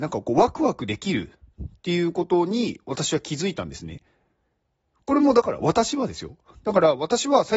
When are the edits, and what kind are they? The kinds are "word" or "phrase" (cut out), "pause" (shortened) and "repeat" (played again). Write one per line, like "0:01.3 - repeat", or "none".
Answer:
none